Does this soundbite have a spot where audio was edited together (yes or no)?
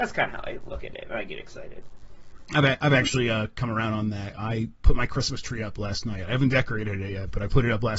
no